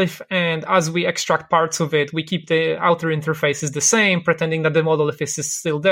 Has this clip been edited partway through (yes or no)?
no